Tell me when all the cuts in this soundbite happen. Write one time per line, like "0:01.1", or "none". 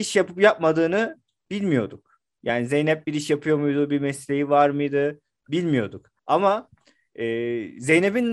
0:06.2

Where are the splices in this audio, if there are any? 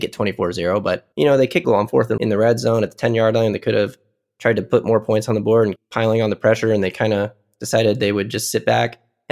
0:01.1
0:01.6
0:02.2
0:05.8

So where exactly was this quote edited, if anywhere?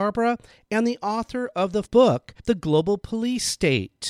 0:01.9
0:02.4

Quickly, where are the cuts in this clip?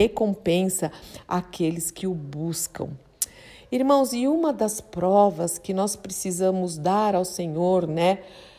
none

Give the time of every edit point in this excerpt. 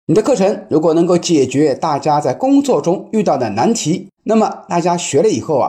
0:04.2

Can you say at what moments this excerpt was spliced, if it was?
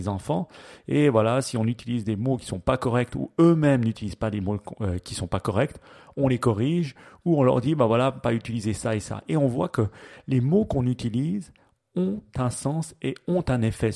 none

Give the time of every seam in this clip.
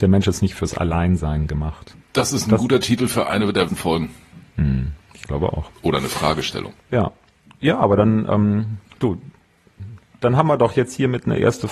0:02.0
0:03.7
0:06.8

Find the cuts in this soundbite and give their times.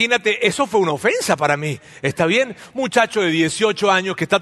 none

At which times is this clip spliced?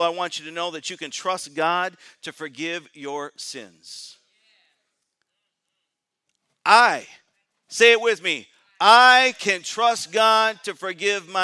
none

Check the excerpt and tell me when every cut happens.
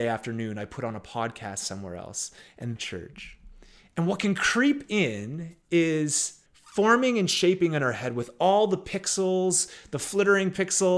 0:02.8
0:06.5

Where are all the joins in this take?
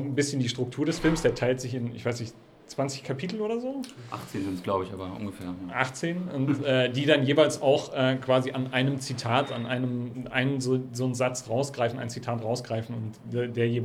none

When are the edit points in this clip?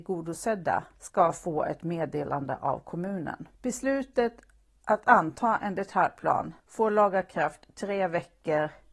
0:00.9
0:03.5
0:06.6

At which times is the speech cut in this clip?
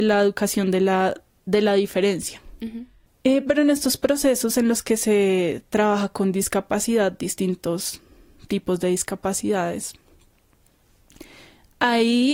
0:03.1

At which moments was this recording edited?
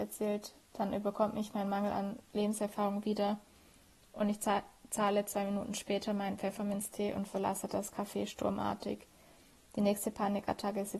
none

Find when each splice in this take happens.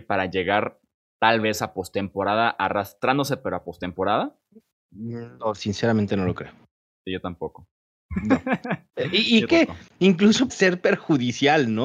0:09.5
0:10.5

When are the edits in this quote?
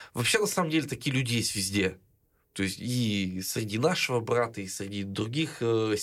none

